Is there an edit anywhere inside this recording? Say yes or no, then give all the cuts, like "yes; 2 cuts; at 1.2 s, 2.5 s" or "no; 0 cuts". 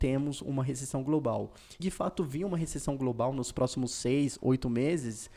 yes; 1 cut; at 1.8 s